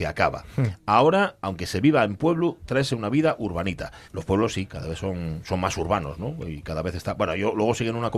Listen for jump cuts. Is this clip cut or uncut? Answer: cut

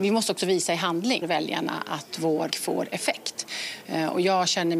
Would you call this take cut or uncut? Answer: cut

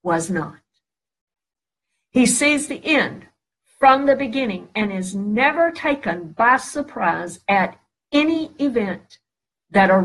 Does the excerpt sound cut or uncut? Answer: uncut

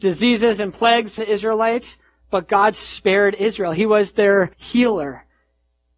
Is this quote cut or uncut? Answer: cut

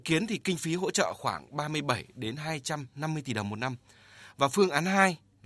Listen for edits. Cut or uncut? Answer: uncut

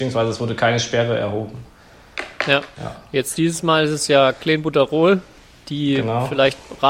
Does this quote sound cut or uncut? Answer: uncut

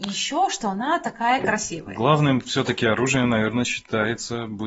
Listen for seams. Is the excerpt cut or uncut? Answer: uncut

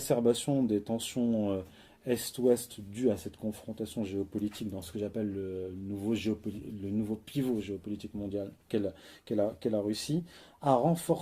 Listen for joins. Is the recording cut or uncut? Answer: uncut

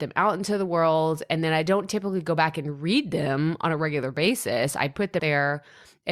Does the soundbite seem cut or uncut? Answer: cut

